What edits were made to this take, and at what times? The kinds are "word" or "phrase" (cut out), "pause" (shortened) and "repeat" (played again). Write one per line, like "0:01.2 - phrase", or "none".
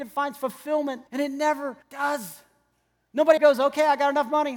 0:01.1 - pause
0:01.8 - pause
0:03.4 - word